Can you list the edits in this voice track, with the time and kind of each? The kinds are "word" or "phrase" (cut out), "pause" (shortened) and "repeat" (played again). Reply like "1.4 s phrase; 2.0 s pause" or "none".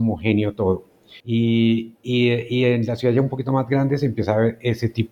1.2 s pause